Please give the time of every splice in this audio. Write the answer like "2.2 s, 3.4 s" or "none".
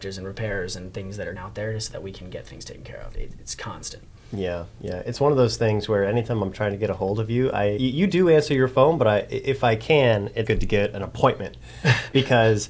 1.4 s, 7.8 s, 10.5 s